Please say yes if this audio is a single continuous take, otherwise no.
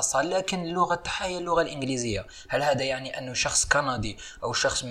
yes